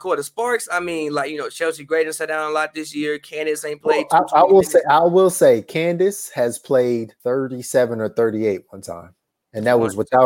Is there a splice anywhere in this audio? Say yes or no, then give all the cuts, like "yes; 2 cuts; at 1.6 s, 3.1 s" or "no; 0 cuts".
yes; 2 cuts; at 7.2 s, 9.3 s